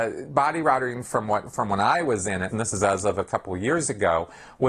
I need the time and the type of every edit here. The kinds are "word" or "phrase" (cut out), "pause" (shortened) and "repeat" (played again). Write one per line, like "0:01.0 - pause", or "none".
0:02.5 - word